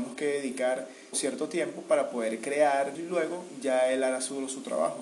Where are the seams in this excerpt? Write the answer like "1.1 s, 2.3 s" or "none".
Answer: 1.1 s, 2.9 s